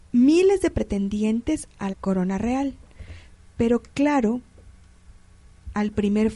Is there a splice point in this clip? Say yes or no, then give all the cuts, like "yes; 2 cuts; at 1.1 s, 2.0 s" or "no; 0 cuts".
yes; 1 cut; at 1.9 s